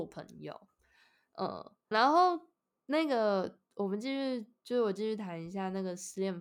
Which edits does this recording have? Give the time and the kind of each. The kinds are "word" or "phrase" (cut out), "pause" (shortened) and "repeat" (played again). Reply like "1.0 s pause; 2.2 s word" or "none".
1.9 s word